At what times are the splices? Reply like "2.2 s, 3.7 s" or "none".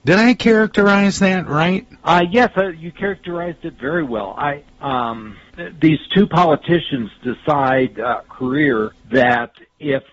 2.0 s, 8.2 s